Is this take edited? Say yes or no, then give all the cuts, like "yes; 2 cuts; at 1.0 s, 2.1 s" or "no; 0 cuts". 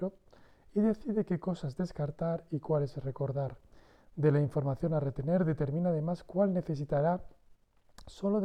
no; 0 cuts